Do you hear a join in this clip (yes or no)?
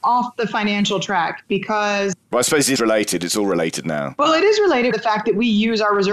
yes